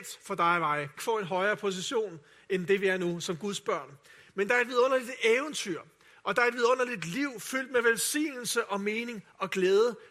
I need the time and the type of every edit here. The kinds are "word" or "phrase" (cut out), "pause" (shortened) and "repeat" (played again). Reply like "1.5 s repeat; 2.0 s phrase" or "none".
1.0 s phrase